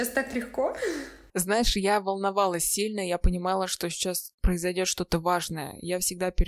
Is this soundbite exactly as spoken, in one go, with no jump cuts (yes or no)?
yes